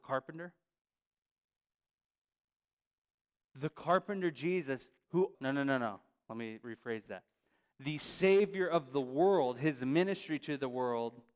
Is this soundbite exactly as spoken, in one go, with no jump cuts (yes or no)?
no